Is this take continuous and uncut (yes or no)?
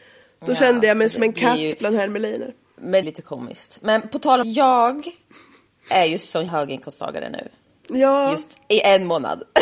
no